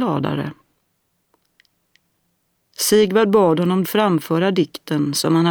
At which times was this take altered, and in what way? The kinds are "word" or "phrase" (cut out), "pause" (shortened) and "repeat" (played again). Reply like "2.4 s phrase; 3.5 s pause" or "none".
3.8 s word